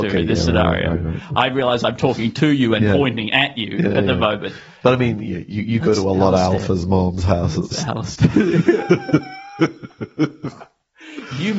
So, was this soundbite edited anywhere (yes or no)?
no